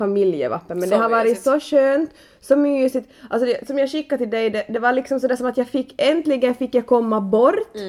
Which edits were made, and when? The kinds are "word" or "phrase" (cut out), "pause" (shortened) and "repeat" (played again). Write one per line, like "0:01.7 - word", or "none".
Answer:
none